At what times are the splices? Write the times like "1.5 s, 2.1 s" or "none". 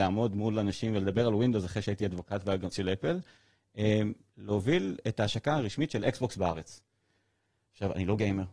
2.7 s

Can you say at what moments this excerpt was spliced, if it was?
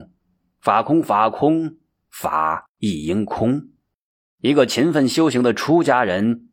none

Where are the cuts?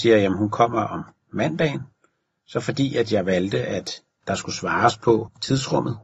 none

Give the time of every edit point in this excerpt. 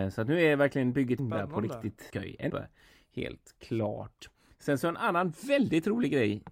1.2 s, 2.1 s, 2.5 s

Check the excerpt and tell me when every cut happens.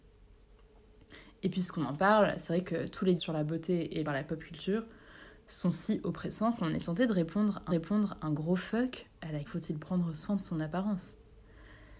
3.2 s, 4.1 s, 7.7 s, 9.5 s

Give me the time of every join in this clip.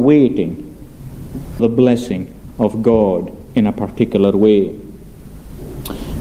1.6 s

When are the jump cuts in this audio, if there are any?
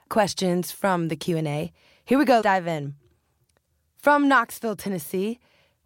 2.4 s

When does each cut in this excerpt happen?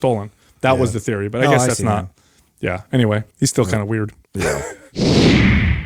none

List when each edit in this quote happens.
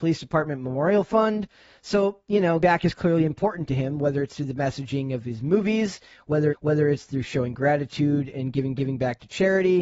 2.6 s, 6.5 s, 8.8 s

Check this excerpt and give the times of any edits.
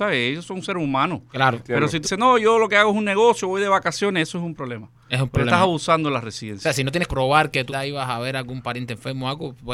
2.0 s, 7.1 s, 7.7 s

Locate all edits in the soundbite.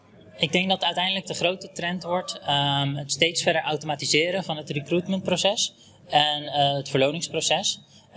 none

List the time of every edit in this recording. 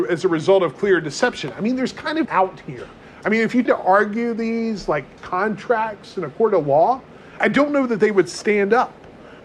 2.2 s, 3.7 s, 5.2 s, 7.4 s

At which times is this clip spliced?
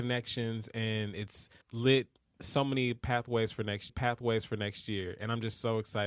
1.6 s, 3.9 s

